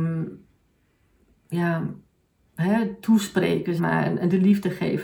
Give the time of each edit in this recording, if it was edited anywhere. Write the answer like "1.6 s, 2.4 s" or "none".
3.8 s